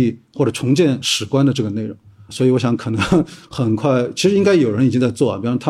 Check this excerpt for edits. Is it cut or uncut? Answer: uncut